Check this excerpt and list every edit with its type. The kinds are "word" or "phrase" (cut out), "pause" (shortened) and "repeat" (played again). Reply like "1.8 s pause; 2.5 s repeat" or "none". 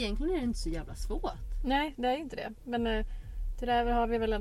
none